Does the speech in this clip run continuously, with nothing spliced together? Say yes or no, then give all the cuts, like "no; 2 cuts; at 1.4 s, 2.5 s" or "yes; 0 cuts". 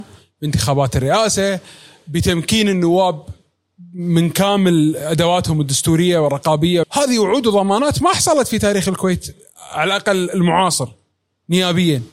no; 1 cut; at 6.8 s